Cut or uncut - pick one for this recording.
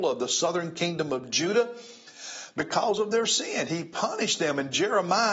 uncut